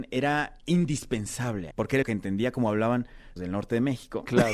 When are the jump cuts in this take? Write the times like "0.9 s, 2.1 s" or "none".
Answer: 1.7 s, 2.0 s, 3.4 s